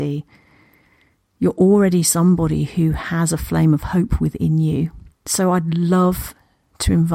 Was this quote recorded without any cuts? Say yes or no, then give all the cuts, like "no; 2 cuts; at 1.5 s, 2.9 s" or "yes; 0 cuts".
no; 1 cut; at 5.1 s